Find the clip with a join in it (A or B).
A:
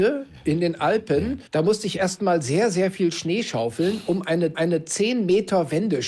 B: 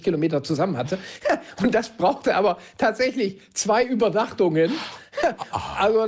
A